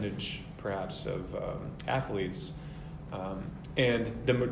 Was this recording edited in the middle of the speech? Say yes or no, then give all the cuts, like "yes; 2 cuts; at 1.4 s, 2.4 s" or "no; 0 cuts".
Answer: no; 0 cuts